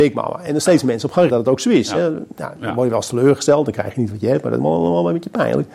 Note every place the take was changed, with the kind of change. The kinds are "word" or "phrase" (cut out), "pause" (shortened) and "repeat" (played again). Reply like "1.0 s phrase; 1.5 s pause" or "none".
1.3 s word